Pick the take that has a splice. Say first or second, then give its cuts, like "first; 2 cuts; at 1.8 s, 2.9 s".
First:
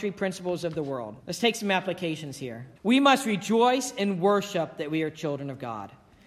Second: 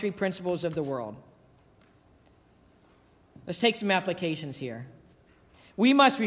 first; 2 cuts; at 1.2 s, 2.8 s